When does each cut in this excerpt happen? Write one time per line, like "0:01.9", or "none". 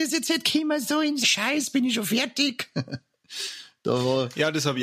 0:01.2